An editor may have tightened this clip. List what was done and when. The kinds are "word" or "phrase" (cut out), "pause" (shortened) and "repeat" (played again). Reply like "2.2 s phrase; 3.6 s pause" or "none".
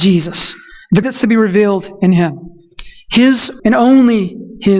1.0 s word; 3.6 s word